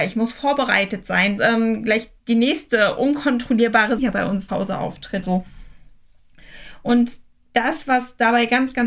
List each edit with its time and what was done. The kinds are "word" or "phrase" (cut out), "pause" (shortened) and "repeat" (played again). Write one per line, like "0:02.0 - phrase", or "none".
0:01.4 - phrase
0:02.2 - pause
0:04.0 - word
0:04.5 - word
0:05.2 - word